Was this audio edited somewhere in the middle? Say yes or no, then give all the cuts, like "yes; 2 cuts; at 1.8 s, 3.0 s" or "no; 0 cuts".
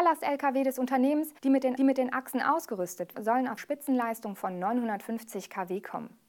yes; 4 cuts; at 1.4 s, 1.8 s, 3.1 s, 3.6 s